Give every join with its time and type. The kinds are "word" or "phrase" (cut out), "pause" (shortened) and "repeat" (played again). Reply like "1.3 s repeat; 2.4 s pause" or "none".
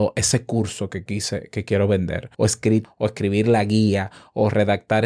2.3 s pause; 2.8 s phrase